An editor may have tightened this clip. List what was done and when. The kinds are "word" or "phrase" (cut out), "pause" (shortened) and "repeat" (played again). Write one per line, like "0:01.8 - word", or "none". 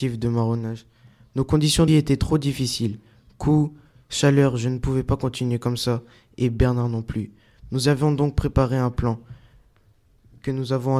0:01.9 - phrase